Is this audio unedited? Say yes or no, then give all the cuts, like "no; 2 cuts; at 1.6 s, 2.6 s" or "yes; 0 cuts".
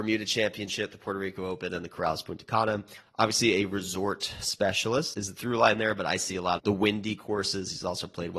no; 2 cuts; at 5.1 s, 6.6 s